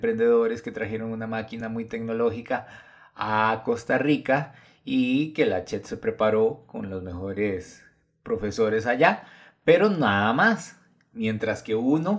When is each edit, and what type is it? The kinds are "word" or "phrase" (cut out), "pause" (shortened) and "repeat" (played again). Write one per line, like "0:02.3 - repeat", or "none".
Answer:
none